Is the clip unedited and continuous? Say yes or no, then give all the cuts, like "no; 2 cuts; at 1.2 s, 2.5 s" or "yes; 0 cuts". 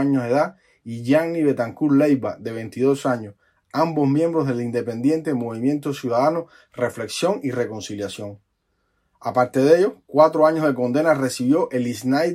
yes; 0 cuts